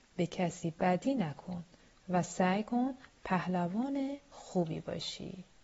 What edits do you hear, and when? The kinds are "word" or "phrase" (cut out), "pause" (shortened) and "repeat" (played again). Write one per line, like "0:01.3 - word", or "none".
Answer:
none